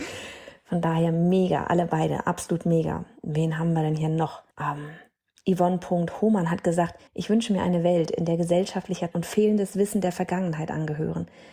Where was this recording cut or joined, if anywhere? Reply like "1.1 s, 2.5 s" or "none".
4.5 s, 7.1 s, 9.1 s